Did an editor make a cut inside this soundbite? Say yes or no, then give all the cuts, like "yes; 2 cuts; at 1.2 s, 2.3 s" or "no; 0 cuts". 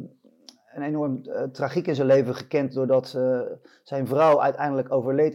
no; 0 cuts